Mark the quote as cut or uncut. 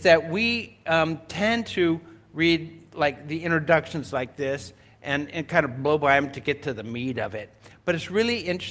uncut